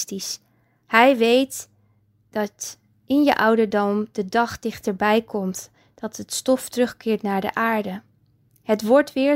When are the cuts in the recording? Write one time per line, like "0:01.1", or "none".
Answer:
none